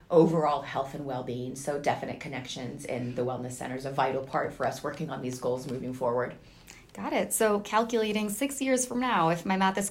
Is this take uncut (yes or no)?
yes